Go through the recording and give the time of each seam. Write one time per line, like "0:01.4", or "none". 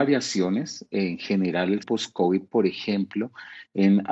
0:01.8